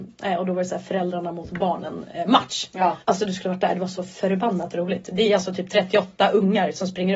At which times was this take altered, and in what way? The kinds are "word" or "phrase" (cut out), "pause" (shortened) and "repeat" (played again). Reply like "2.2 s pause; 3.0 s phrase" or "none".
3.0 s pause